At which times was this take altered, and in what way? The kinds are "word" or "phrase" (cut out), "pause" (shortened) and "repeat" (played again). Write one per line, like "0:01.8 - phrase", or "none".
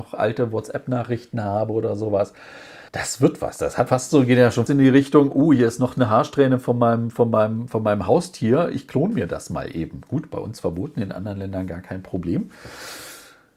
0:02.9 - pause
0:03.9 - word
0:04.7 - word

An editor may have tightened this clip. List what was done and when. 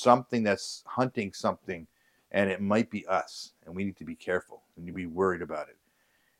none

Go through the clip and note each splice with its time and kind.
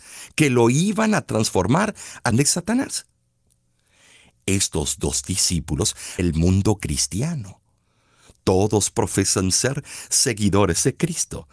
0:02.3 - word
0:06.2 - word

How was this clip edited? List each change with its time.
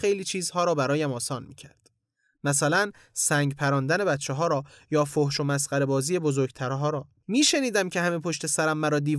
none

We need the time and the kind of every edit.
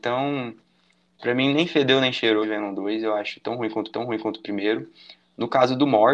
0:02.4 - word
0:03.9 - repeat

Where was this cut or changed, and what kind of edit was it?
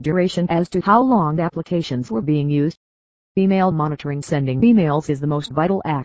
none

